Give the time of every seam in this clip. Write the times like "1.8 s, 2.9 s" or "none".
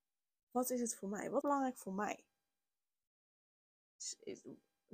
1.4 s